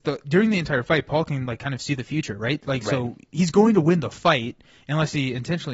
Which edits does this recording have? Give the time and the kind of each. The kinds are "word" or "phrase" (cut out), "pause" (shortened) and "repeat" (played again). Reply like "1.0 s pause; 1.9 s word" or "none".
none

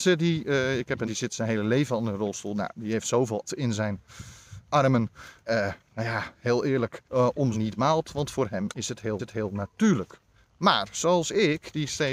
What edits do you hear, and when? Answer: 1.0 s word; 3.5 s word; 4.6 s word; 5.4 s phrase; 7.1 s pause; 7.5 s phrase; 9.2 s repeat

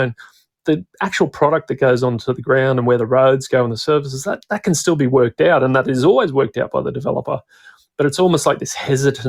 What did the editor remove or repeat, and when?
none

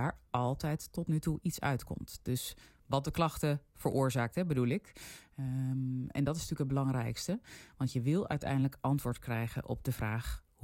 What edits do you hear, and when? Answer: none

